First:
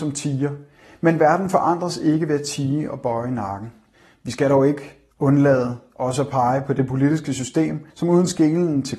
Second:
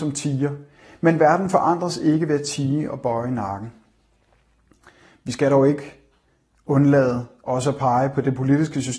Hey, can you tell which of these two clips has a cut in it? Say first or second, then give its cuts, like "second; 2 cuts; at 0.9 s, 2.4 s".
first; 3 cuts; at 3.9 s, 5.1 s, 7.9 s